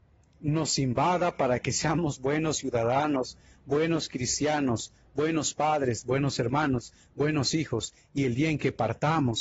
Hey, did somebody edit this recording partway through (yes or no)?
no